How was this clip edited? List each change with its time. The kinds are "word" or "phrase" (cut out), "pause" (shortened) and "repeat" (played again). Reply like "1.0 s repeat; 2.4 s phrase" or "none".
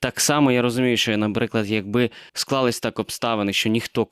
2.3 s pause